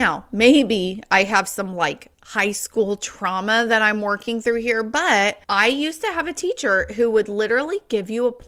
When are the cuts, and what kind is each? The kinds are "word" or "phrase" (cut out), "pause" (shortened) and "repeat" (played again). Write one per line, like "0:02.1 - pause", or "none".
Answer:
0:02.1 - pause
0:05.4 - pause